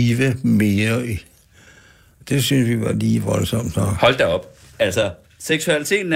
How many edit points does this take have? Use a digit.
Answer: 0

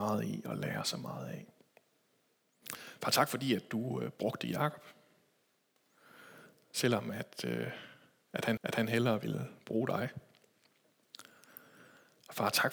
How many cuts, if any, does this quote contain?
1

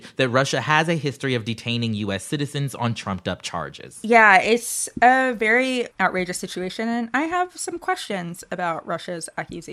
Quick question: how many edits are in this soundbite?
1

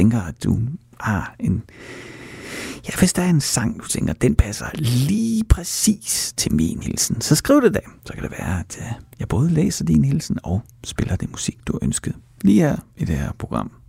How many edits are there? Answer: 2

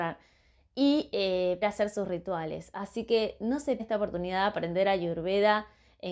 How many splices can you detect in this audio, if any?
2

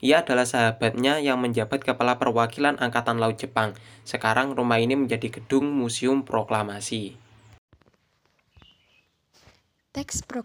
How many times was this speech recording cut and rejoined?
0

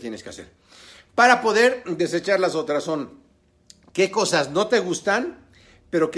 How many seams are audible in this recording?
0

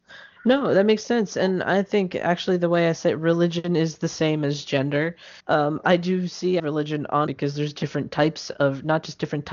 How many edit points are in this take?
3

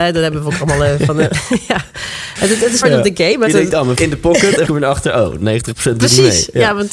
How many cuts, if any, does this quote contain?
4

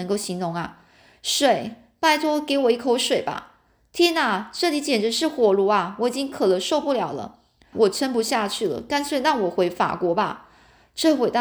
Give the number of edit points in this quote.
1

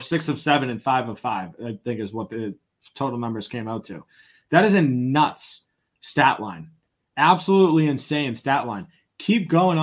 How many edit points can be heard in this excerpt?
0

